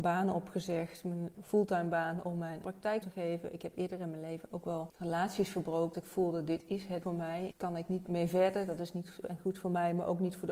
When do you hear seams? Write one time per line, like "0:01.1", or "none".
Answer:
0:02.6
0:03.0
0:05.9
0:07.0
0:08.0
0:09.2